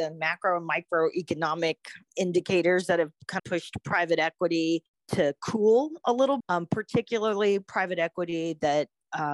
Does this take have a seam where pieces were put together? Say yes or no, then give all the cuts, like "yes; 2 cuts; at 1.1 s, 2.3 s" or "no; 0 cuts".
yes; 3 cuts; at 2.1 s, 3.4 s, 6.4 s